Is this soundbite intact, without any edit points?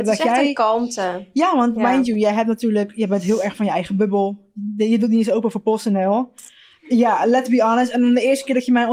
yes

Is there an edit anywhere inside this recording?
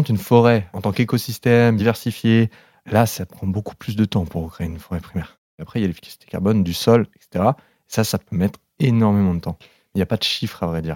no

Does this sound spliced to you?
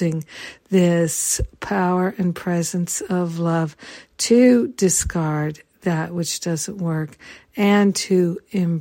no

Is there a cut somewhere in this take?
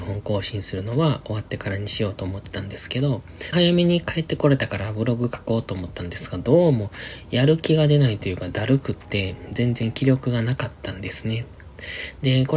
yes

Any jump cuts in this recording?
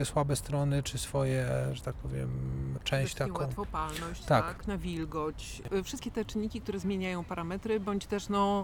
yes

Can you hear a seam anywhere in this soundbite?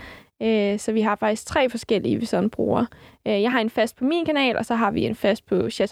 no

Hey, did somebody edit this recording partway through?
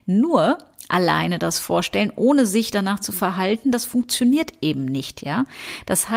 no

